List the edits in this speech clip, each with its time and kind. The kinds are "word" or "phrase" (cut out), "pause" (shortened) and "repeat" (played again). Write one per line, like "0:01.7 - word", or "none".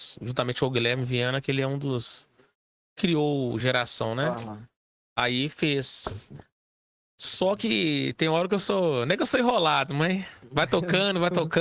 none